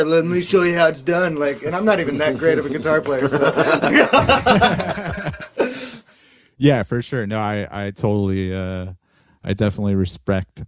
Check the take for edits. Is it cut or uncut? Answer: uncut